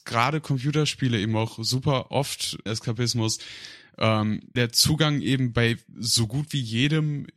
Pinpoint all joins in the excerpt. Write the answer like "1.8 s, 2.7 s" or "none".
2.7 s, 4.6 s